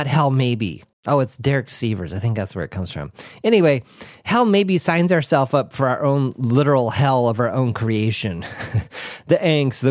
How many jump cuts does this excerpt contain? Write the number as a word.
one